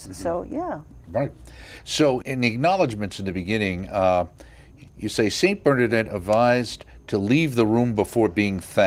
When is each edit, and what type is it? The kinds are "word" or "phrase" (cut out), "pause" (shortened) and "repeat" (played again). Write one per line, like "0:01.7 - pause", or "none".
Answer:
0:02.2 - word
0:04.9 - pause